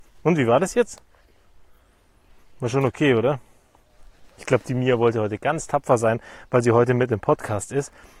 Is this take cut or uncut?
cut